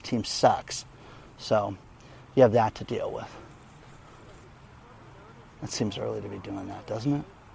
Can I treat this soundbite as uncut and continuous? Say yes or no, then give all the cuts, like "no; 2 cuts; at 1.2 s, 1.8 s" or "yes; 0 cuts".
yes; 0 cuts